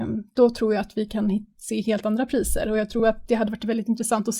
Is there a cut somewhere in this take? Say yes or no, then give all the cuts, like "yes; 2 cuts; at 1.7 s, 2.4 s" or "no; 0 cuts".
no; 0 cuts